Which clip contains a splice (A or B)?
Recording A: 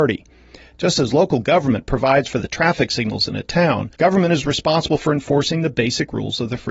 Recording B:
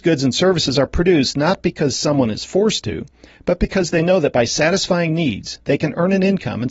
A